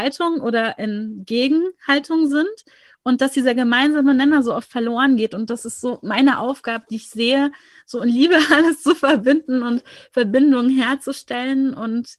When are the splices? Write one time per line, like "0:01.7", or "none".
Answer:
none